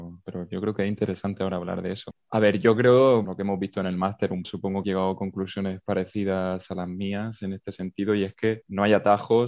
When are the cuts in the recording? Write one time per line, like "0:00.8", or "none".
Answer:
0:03.2
0:04.4
0:04.8